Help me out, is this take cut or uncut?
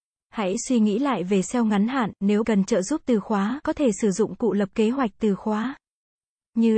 cut